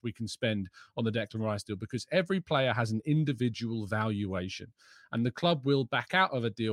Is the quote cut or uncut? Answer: uncut